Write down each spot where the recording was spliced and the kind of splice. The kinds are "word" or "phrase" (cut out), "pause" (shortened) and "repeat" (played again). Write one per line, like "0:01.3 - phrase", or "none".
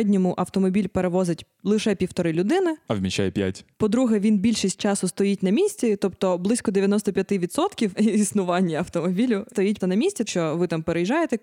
0:07.9 - word
0:09.5 - word
0:09.8 - word
0:10.3 - word